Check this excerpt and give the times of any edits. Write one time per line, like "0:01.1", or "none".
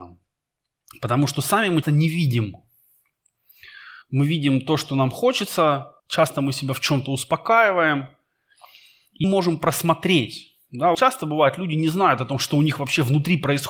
0:01.8
0:04.0
0:06.0
0:09.2
0:10.9